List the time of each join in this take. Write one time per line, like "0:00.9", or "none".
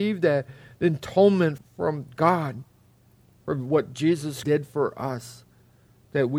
0:01.6
0:04.4

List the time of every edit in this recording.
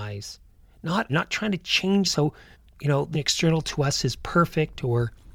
0:01.1
0:02.0
0:02.5
0:03.1

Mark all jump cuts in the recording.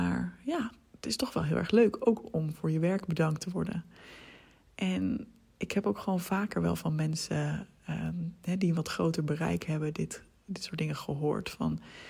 none

